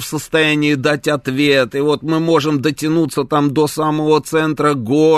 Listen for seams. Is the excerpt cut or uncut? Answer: uncut